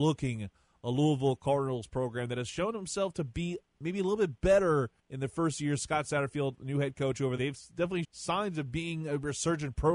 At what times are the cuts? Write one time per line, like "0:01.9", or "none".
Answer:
0:05.0
0:07.4
0:08.0